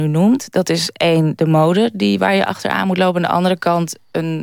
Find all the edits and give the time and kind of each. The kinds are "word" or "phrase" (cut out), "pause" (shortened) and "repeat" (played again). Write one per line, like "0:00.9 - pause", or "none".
none